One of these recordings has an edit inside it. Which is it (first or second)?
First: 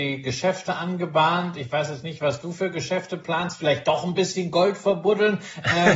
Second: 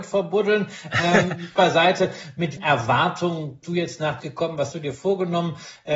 second